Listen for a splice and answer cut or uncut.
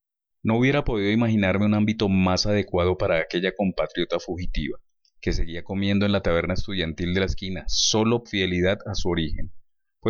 cut